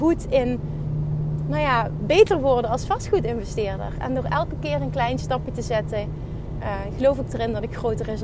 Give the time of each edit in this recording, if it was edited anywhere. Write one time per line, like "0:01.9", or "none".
none